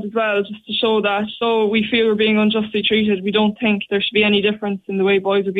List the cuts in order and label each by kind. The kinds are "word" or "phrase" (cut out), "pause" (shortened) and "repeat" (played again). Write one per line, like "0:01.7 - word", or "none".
0:01.4 - word